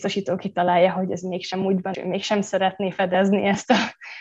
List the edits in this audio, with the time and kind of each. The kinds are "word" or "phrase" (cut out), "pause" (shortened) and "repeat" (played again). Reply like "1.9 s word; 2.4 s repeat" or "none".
1.9 s word